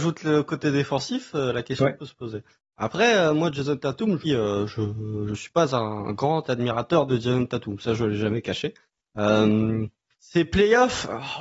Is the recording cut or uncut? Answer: cut